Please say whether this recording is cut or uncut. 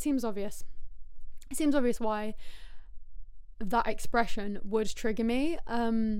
uncut